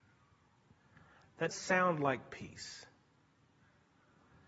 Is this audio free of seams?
no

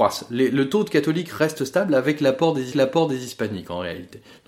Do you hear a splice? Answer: yes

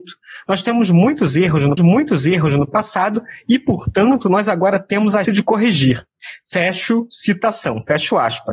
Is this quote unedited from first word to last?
no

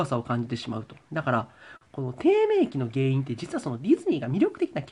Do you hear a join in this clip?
yes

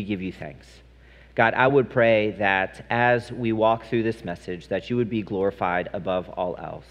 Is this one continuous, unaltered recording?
yes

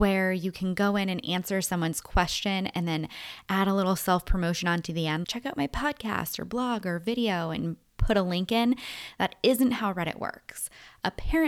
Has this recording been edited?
yes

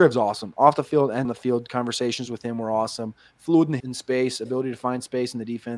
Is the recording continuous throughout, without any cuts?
no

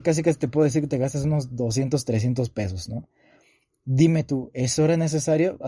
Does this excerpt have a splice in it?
no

